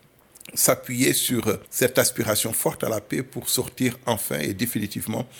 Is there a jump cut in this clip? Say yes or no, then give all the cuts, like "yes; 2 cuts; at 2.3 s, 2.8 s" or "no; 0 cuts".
yes; 1 cut; at 1.6 s